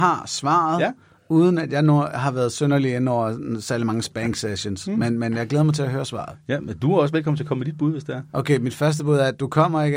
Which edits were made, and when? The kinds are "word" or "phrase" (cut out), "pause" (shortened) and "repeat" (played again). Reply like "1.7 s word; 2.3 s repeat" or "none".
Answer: none